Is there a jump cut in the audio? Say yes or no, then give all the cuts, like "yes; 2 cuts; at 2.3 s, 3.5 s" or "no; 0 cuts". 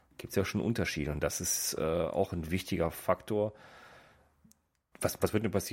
no; 0 cuts